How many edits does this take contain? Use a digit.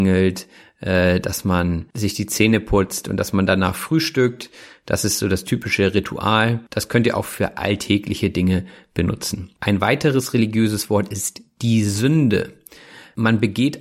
0